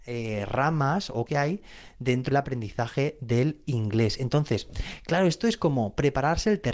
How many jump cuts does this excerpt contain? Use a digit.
2